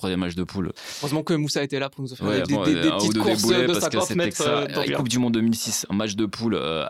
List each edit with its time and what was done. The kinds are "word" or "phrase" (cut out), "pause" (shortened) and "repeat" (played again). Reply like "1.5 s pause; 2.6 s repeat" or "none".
2.4 s word; 4.9 s phrase